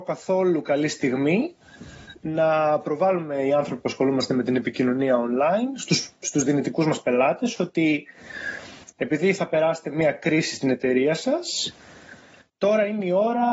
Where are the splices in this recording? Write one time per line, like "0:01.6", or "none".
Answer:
none